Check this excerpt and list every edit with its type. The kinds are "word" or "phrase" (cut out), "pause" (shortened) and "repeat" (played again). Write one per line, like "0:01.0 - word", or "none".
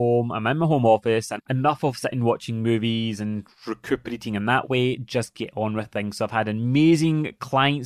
none